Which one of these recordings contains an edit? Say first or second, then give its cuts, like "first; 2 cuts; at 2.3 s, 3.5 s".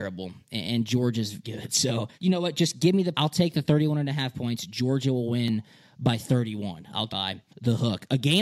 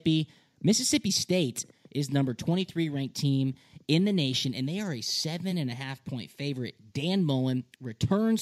first; 5 cuts; at 1.4 s, 2.1 s, 3.1 s, 7.1 s, 7.5 s